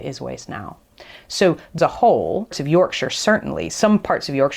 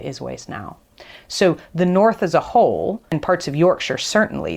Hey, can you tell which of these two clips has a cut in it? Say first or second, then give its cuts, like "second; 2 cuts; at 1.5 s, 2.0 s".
first; 2 cuts; at 1.8 s, 2.5 s